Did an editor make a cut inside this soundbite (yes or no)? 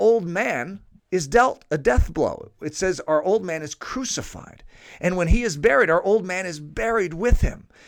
yes